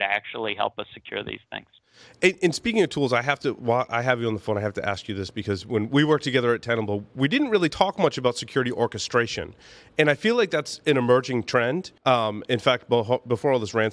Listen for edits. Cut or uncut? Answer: cut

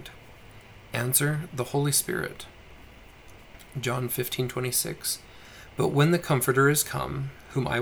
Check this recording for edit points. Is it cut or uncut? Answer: uncut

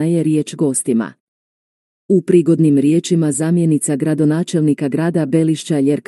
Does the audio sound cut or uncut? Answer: uncut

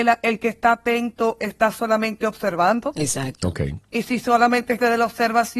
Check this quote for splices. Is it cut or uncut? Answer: uncut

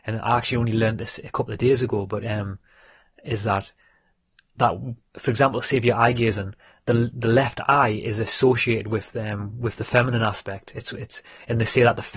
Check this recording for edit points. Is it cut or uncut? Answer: uncut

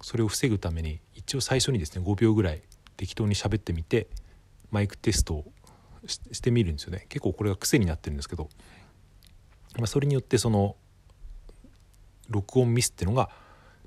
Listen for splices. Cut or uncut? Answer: uncut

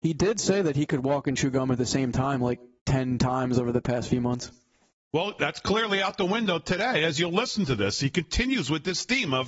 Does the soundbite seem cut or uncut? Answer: uncut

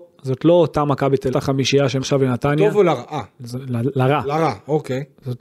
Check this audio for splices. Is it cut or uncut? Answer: cut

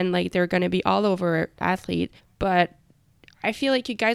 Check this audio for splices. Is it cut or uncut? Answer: cut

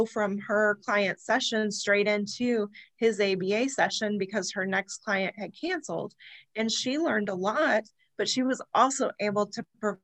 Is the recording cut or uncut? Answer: uncut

